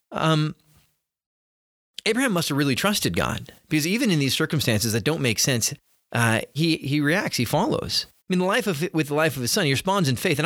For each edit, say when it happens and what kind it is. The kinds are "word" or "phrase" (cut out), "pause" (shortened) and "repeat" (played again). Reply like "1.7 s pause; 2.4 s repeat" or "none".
6.6 s word; 8.2 s pause

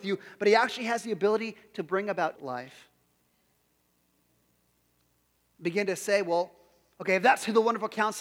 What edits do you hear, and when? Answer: 2.3 s phrase

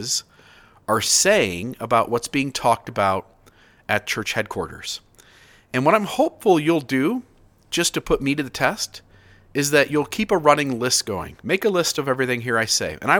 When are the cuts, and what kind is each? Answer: none

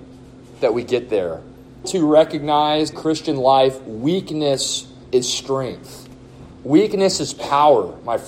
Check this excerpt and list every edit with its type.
1.8 s phrase; 2.9 s phrase

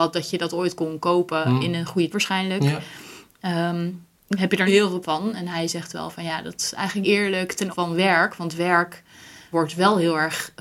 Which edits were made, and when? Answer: 2.1 s word; 4.7 s word; 5.0 s word; 7.0 s word; 7.7 s word; 9.5 s word

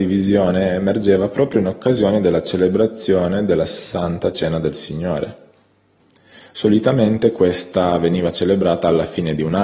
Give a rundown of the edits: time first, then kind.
none

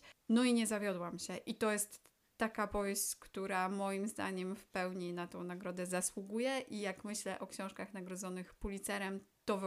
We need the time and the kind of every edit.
none

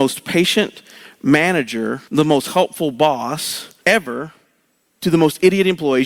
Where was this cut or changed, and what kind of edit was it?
2.1 s pause; 3.8 s pause

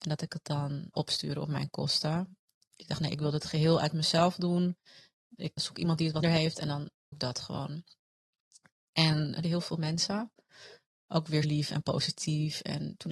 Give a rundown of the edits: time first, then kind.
0.9 s word; 5.6 s word; 6.2 s word; 7.1 s word; 9.4 s word; 11.4 s word

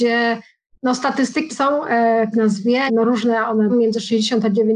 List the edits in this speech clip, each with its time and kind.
1.5 s word; 2.3 s word; 2.9 s word; 3.7 s word

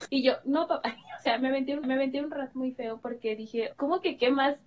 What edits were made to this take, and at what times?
1.8 s repeat; 3.7 s phrase

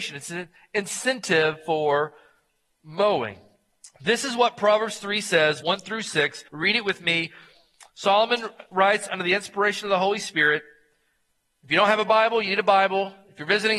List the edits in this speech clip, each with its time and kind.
5.6 s word; 6.5 s pause

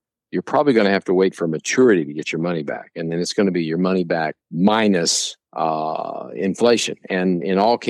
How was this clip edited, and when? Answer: none

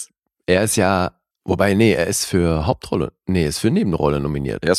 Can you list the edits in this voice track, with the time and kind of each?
1.3 s pause

